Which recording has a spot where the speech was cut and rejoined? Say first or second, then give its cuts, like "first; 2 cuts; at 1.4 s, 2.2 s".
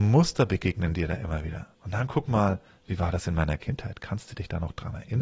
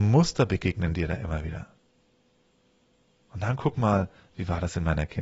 first; 1 cut; at 1.7 s